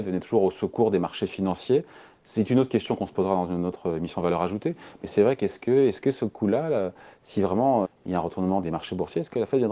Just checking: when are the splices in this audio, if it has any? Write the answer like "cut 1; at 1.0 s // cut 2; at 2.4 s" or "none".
cut 1; at 7.8 s // cut 2; at 8.6 s